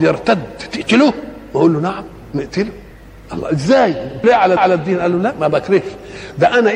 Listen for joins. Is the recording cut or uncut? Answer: cut